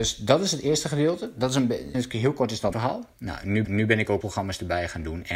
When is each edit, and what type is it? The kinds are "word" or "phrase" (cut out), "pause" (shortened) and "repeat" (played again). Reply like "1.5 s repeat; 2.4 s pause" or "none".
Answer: 1.9 s word; 2.7 s word; 3.1 s pause; 3.6 s repeat; 4.2 s phrase